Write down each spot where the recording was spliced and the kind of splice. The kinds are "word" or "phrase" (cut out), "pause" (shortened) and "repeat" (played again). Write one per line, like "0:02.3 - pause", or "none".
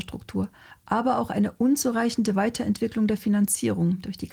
none